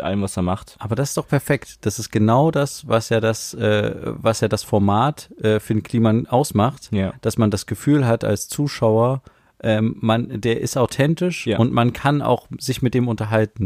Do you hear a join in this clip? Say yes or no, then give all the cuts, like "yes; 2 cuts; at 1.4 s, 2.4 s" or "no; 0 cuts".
no; 0 cuts